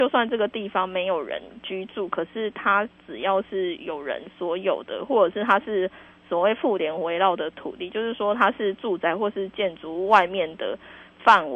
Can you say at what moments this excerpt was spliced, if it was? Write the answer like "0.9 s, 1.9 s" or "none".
none